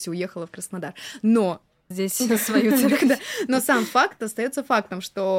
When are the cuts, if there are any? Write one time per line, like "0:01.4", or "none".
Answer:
0:01.9